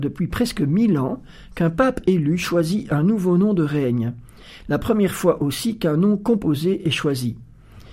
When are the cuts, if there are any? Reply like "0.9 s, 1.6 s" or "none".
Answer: none